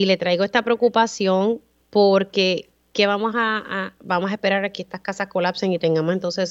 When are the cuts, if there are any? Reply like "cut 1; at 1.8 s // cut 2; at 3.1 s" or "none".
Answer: none